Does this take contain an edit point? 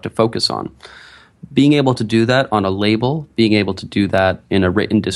no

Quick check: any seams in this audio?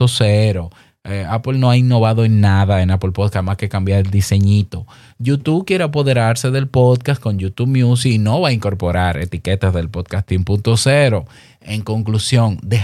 no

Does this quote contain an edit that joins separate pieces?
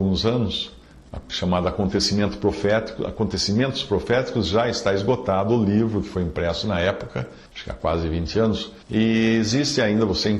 yes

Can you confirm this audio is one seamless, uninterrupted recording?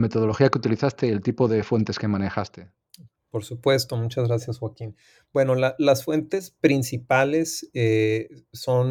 yes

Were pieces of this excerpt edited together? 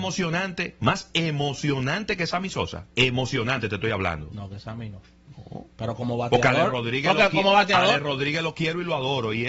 yes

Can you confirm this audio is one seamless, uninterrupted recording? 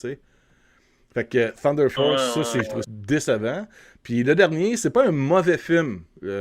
no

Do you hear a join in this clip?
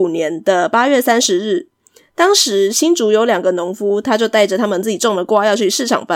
no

